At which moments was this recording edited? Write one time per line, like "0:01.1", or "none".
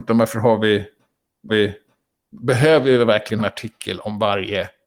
0:01.5
0:03.4